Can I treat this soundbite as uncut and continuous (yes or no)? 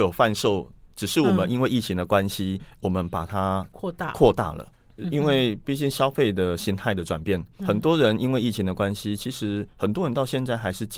no